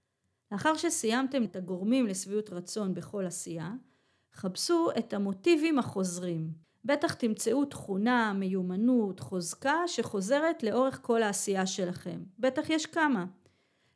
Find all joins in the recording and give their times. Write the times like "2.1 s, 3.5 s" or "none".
1.4 s, 6.6 s

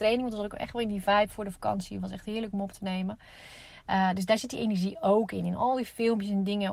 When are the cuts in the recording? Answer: none

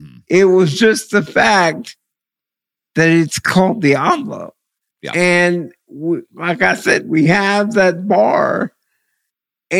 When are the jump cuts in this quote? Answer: none

